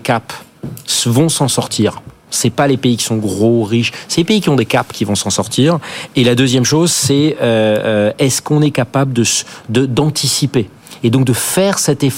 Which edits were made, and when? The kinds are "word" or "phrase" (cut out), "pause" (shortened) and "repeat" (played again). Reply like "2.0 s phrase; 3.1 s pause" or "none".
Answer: none